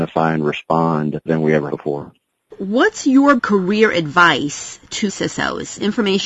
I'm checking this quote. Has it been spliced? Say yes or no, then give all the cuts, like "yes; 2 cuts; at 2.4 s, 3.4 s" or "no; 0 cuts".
yes; 5 cuts; at 1.3 s, 1.7 s, 2.3 s, 3.4 s, 5.1 s